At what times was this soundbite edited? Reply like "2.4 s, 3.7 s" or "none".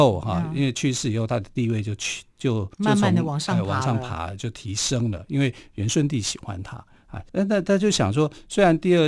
2.7 s, 7.3 s